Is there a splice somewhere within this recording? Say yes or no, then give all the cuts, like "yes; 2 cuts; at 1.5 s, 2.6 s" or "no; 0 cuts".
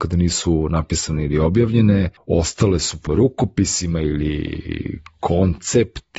yes; 2 cuts; at 2.2 s, 3.1 s